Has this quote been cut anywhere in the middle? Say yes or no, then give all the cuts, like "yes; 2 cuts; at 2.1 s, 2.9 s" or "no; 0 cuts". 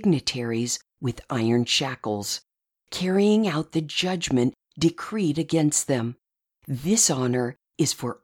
no; 0 cuts